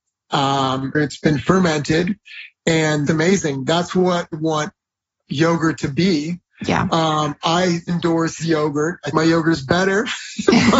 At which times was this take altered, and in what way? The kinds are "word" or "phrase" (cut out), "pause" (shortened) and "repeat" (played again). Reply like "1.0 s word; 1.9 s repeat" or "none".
0.9 s word; 3.1 s word; 4.3 s word; 7.9 s word; 8.4 s word; 9.1 s word